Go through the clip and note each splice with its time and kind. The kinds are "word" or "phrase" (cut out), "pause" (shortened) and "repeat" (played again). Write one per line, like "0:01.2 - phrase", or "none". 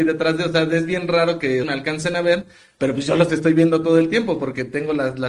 0:01.6 - word